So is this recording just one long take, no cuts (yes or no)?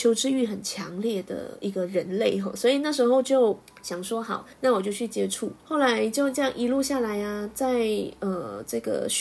no